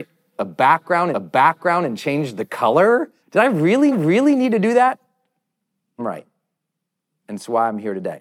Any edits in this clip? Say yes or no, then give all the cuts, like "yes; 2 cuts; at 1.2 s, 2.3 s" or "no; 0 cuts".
yes; 4 cuts; at 1.1 s, 3.2 s, 3.9 s, 6.0 s